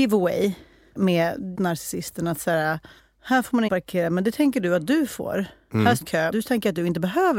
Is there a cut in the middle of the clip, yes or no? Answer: yes